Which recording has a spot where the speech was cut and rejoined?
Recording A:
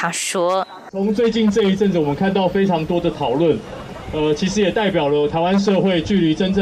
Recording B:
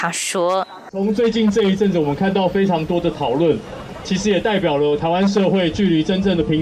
B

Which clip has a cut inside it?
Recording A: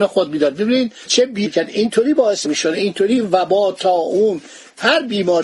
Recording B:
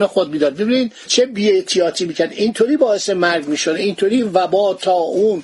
A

